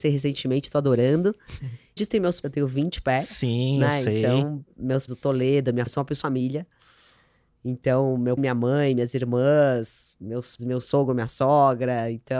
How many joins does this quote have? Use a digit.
7